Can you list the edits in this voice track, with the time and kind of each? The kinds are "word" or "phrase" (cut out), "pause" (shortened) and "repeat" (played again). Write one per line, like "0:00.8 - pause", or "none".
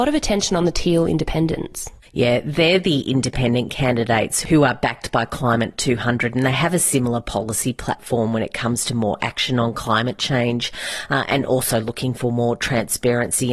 none